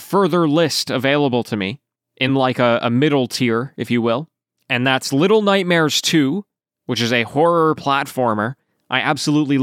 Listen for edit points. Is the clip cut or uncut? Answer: uncut